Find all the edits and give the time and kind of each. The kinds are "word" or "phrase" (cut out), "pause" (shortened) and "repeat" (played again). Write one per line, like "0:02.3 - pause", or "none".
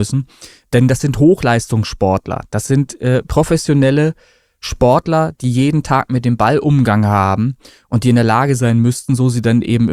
none